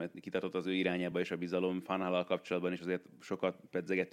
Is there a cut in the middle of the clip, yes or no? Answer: no